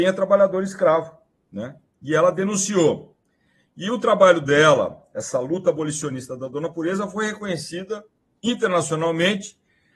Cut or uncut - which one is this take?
uncut